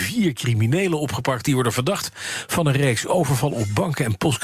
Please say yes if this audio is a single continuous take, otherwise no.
yes